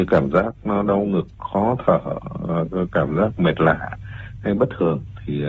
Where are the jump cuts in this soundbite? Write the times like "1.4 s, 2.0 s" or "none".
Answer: none